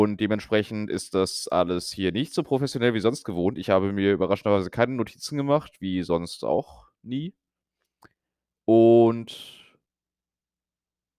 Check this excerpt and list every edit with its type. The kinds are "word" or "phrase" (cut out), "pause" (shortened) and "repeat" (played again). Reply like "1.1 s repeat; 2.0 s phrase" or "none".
none

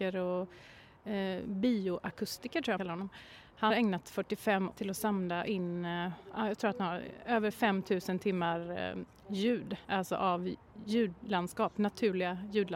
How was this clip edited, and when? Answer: 2.8 s word; 3.7 s word; 4.7 s phrase; 9.8 s pause

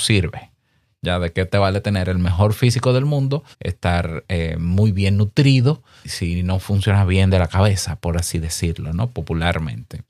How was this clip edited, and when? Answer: 3.5 s pause; 6.0 s word

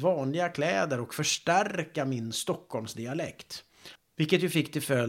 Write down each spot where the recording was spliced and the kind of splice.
4.0 s pause

